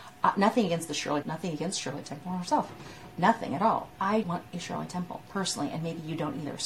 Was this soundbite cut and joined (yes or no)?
yes